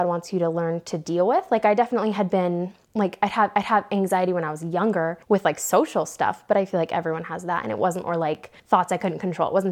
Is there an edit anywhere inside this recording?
yes; 5 cuts; at 2.8 s, 3.5 s, 5.2 s, 8.0 s, 8.6 s

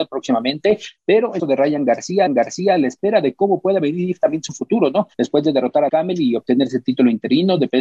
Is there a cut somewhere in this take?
yes; 4 cuts; at 1.4 s, 2.3 s, 5.1 s, 5.9 s

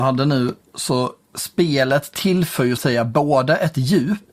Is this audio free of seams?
no; 1 cut; at 2.8 s

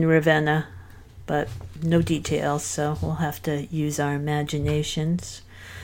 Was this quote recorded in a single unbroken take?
yes; 0 cuts

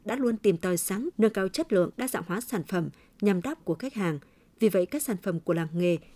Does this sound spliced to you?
yes; 3 cuts; at 1.1 s, 1.9 s, 3.6 s

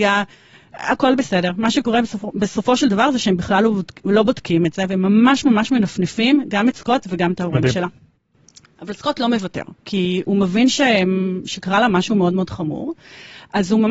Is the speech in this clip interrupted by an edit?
yes; 2 cuts; at 2.3 s, 9.8 s

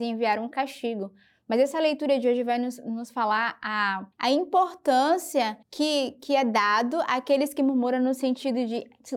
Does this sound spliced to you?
yes; 2 cuts; at 4.1 s, 5.6 s

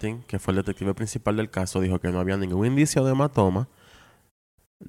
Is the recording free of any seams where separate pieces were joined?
yes; 0 cuts

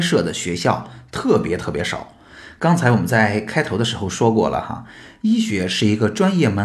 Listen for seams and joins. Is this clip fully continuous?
yes; 0 cuts

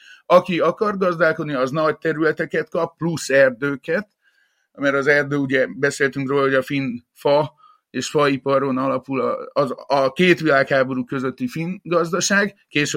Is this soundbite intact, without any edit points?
yes; 0 cuts

